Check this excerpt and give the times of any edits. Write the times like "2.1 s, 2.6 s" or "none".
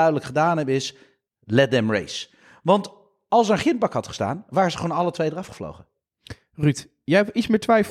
none